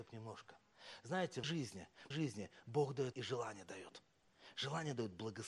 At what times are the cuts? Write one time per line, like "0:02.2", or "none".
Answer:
0:01.4
0:02.1
0:03.1